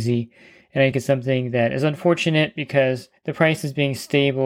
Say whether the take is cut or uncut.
cut